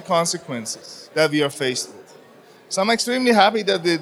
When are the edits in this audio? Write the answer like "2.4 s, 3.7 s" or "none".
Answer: none